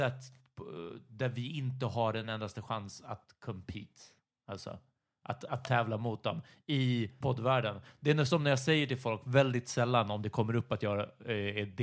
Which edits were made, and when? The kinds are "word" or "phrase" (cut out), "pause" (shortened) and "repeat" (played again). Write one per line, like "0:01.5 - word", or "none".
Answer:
0:07.2 - word